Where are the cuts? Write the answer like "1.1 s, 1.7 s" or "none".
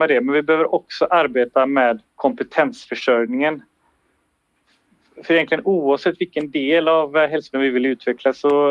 2.1 s, 7.5 s